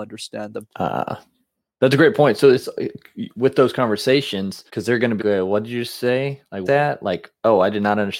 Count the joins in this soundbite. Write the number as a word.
three